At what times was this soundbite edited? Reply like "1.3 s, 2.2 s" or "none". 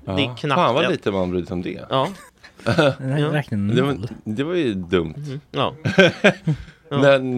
2.3 s